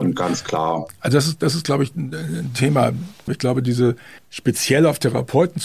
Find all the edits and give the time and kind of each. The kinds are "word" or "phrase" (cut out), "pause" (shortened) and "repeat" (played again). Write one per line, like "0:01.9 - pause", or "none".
0:04.2 - pause

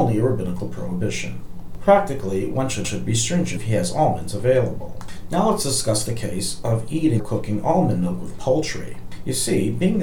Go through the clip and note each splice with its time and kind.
0:02.8 - repeat
0:03.6 - word
0:07.2 - word

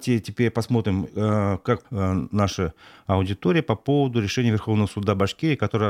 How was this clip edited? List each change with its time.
0:01.8 - word

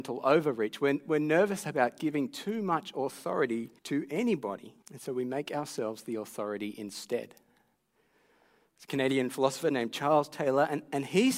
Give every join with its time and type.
0:03.8 - pause
0:04.8 - pause

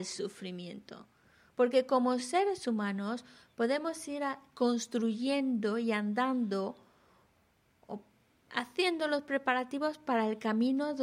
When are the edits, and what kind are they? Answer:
none

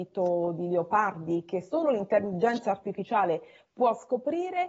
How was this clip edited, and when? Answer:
none

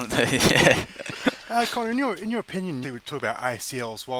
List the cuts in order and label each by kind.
0:02.8 - phrase

